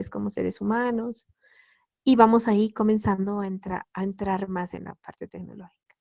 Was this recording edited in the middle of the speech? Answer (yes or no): no